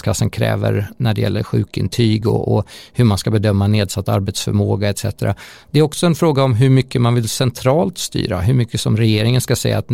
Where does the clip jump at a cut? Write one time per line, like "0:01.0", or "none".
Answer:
none